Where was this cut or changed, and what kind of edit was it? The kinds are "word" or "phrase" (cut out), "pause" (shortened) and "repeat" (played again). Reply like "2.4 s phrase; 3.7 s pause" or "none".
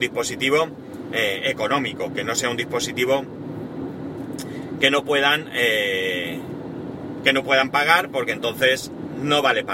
none